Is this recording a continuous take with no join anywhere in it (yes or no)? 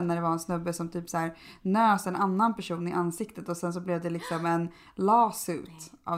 yes